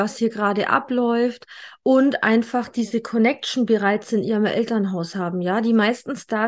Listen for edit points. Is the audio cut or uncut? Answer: uncut